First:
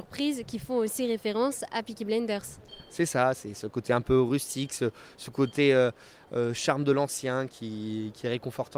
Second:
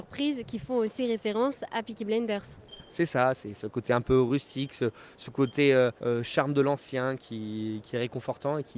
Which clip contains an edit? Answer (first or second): second